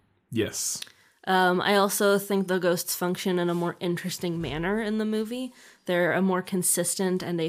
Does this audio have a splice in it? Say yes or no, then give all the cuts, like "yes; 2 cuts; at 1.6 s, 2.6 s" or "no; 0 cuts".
no; 0 cuts